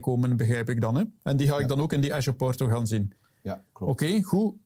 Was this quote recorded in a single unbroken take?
yes; 0 cuts

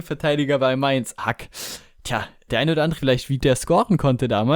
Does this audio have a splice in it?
yes; 4 cuts; at 1.2 s, 2.5 s, 3.0 s, 3.4 s

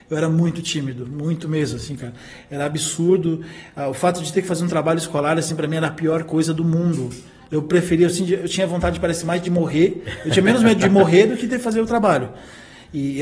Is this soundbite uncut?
yes; 0 cuts

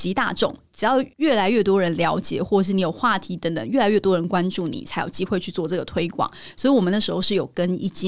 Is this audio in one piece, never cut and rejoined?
no; 1 cut; at 1.1 s

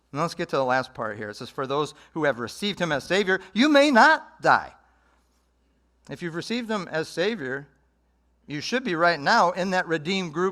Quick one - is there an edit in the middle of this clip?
no; 0 cuts

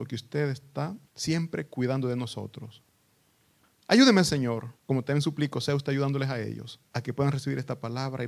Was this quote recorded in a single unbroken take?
no; 3 cuts; at 1.1 s, 4.8 s, 6.9 s

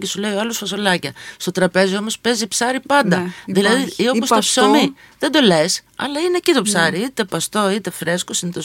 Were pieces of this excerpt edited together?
no; 0 cuts

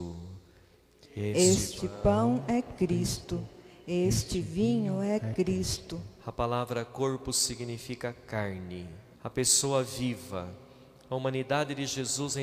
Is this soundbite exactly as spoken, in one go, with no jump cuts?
no; 1 cut; at 9.1 s

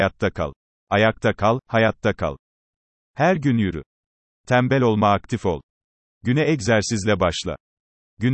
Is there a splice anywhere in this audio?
no; 0 cuts

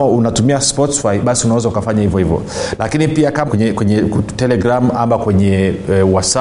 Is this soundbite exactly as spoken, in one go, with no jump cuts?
no; 1 cut; at 3.5 s

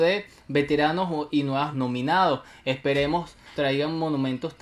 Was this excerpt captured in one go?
no; 2 cuts; at 1.7 s, 3.5 s

